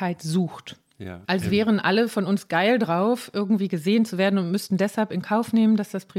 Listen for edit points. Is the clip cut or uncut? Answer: cut